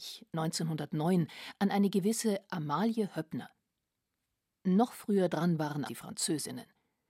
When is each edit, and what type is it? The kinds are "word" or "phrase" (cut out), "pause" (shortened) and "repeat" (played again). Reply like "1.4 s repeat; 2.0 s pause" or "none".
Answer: 5.9 s word